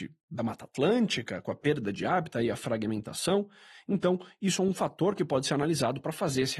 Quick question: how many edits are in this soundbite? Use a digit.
0